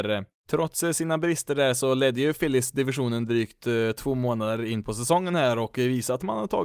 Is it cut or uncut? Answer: uncut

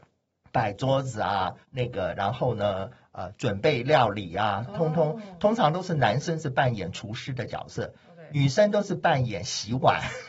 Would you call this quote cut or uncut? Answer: cut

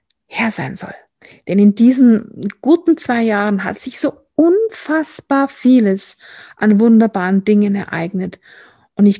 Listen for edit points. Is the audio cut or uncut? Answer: uncut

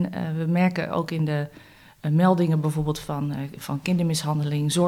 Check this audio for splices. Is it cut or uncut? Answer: uncut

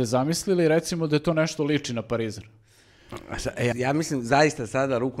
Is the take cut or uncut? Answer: cut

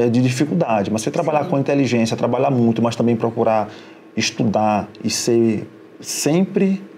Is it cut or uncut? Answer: uncut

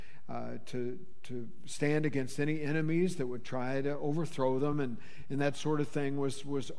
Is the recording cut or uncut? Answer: uncut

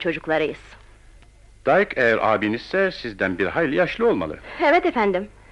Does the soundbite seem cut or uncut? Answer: uncut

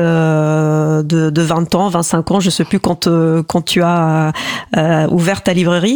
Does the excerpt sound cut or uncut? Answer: uncut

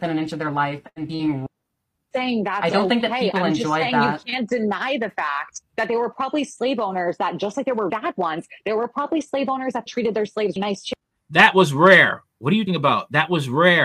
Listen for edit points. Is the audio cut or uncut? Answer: cut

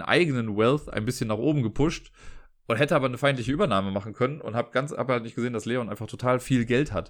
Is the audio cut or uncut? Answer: uncut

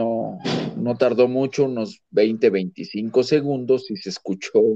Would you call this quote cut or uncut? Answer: uncut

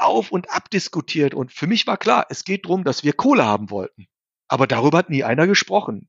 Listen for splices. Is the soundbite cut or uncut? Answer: uncut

